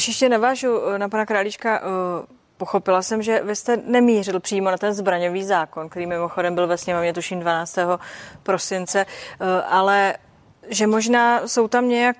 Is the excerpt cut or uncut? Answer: uncut